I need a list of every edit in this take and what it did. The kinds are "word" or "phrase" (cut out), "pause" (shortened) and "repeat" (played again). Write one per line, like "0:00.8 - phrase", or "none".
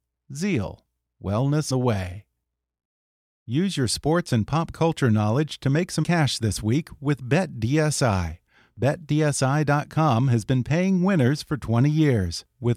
0:01.7 - word
0:06.0 - word